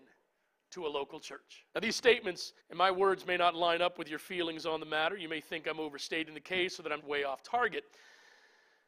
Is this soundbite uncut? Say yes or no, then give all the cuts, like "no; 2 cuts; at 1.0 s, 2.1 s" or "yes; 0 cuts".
no; 3 cuts; at 1.7 s, 2.6 s, 7.0 s